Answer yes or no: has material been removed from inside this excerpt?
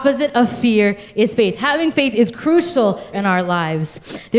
yes